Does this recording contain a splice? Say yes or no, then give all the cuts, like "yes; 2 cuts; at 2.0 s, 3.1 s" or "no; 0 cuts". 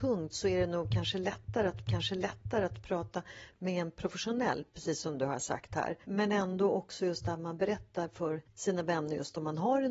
yes; 2 cuts; at 1.9 s, 4.7 s